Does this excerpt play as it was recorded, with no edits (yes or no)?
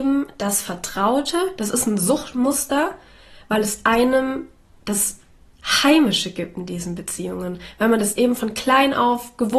yes